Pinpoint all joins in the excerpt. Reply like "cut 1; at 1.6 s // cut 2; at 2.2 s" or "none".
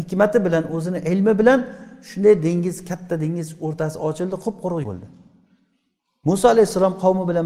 cut 1; at 4.8 s